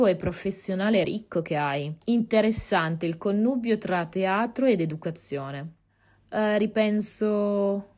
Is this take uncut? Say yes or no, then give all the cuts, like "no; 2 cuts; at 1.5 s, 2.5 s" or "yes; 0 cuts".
no; 2 cuts; at 2.0 s, 5.9 s